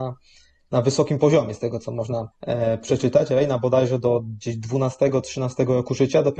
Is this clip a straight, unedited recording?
no; 1 cut; at 2.3 s

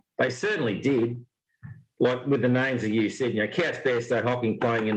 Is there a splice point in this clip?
no; 0 cuts

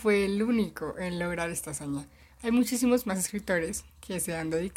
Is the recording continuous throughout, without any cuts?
yes; 0 cuts

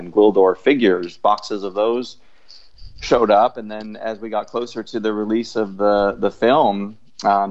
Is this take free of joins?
yes; 0 cuts

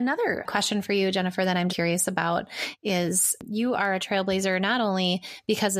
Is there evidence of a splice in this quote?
yes; 1 cut; at 1.7 s

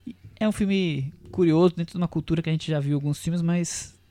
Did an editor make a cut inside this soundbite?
no; 0 cuts

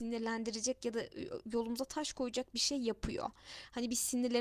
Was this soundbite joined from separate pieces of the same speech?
no; 0 cuts

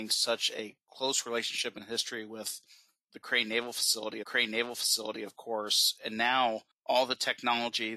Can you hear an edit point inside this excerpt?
yes; 2 cuts; at 4.2 s, 6.7 s

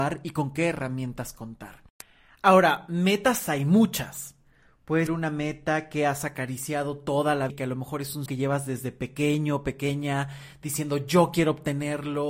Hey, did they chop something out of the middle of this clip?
yes; 4 cuts; at 2.0 s, 5.1 s, 7.5 s, 8.3 s

